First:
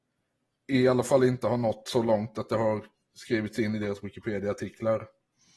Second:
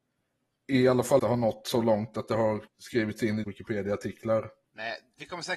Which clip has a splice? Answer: second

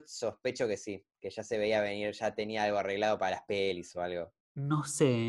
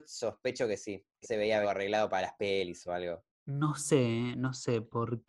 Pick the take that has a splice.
second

